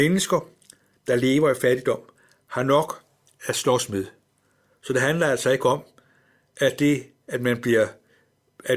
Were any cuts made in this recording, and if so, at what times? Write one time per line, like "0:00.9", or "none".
none

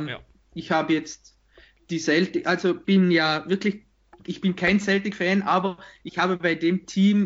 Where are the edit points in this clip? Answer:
0:02.8

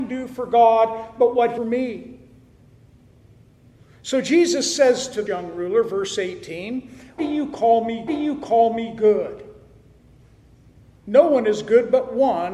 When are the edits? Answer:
0:01.6
0:05.3
0:07.2
0:08.1

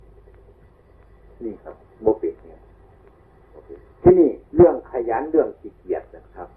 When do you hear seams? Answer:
0:03.9
0:04.5

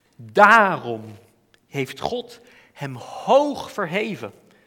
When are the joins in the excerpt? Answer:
none

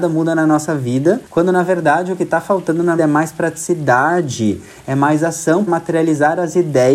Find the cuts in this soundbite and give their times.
0:01.3
0:03.0
0:05.7

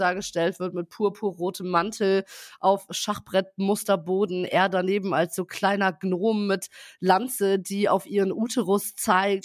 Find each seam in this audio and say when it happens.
none

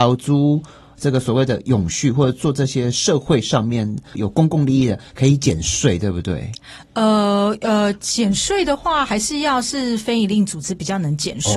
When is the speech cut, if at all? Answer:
0:04.1

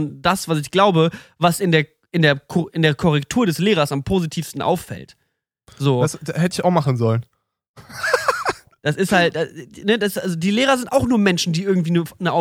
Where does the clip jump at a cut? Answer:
none

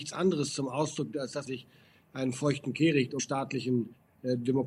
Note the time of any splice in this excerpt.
0:01.1
0:01.5
0:03.2

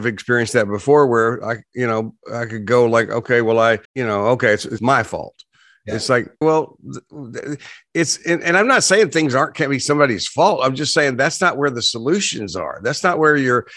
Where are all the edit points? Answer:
0:03.8
0:04.8
0:06.4

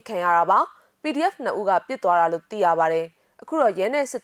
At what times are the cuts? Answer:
none

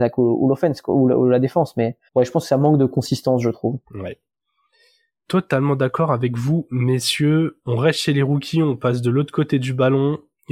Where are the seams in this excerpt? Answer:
0:02.1
0:03.8

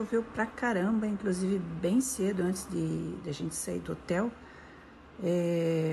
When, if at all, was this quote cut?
none

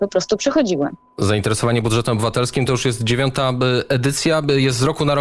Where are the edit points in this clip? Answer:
none

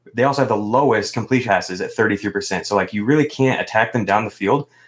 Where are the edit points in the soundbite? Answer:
0:01.5

